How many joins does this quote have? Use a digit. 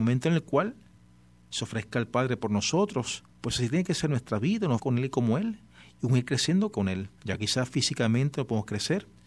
4